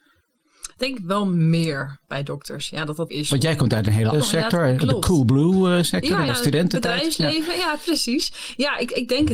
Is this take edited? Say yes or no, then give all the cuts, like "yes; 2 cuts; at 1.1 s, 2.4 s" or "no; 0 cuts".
yes; 3 cuts; at 3.1 s, 4.1 s, 6.3 s